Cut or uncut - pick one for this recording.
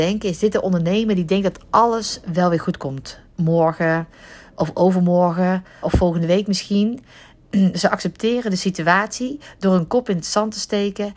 cut